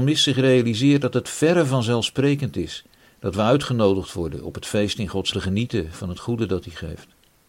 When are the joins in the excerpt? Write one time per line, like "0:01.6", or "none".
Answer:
0:05.3